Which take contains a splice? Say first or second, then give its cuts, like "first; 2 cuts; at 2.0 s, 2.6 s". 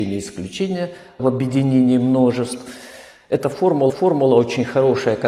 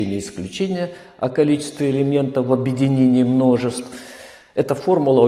first; 2 cuts; at 1.2 s, 3.9 s